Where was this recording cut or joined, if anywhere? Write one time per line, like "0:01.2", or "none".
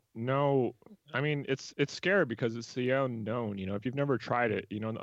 0:01.0
0:01.7